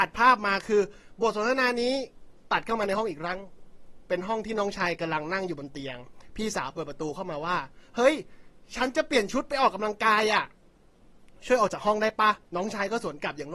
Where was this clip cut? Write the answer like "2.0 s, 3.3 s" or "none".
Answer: 12.4 s